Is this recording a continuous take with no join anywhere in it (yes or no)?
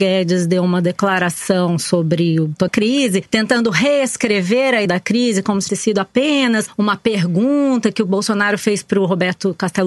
no